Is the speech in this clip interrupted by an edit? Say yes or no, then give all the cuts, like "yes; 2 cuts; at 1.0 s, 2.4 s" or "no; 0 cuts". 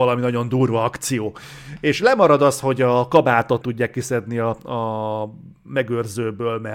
yes; 1 cut; at 3.6 s